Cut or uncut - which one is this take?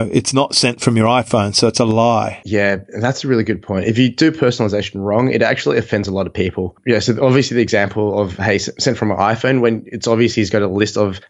uncut